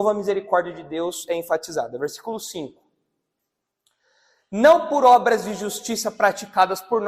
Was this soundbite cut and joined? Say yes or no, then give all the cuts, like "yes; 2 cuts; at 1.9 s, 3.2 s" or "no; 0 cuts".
no; 0 cuts